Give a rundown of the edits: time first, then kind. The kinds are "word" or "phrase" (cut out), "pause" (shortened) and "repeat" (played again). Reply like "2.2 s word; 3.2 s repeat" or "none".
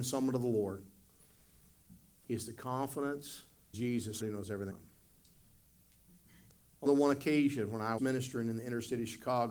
3.7 s word; 4.2 s word; 4.7 s word; 6.9 s word; 8.0 s word